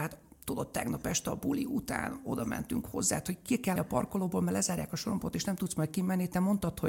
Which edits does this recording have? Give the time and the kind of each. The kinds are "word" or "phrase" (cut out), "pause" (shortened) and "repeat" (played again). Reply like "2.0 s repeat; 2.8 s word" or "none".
3.8 s word